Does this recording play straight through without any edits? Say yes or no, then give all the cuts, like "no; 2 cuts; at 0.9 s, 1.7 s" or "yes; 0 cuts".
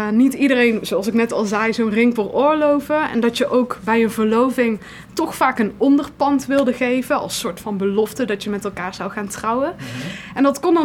no; 1 cut; at 2.2 s